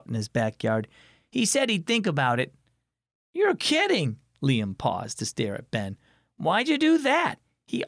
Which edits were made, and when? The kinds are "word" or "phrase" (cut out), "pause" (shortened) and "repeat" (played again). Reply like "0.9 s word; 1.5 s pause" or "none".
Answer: none